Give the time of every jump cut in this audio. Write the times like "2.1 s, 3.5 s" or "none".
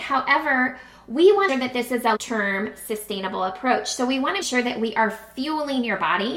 1.5 s, 2.2 s, 4.4 s